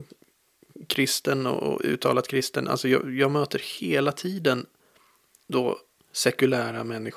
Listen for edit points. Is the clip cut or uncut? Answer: uncut